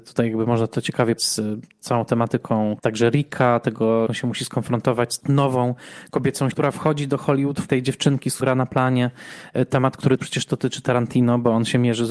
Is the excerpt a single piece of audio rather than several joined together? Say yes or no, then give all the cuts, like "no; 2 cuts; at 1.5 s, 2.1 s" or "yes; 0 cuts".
no; 8 cuts; at 1.2 s, 2.8 s, 4.1 s, 5.2 s, 6.5 s, 7.7 s, 8.4 s, 10.2 s